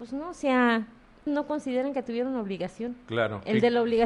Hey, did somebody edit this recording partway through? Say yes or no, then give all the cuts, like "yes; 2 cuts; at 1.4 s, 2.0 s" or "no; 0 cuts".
yes; 1 cut; at 1.3 s